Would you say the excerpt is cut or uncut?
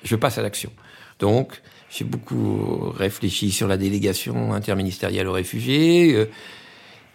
uncut